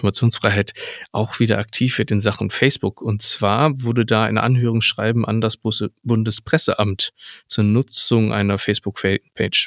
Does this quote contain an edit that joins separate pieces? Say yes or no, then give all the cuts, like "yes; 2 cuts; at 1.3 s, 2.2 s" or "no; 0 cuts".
no; 0 cuts